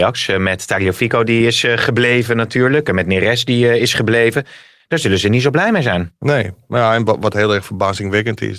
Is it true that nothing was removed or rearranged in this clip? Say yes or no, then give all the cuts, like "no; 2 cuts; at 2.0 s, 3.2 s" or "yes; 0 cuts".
yes; 0 cuts